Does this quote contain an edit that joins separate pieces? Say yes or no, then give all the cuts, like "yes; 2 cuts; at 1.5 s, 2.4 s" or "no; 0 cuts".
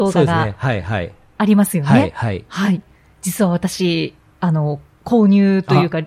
no; 0 cuts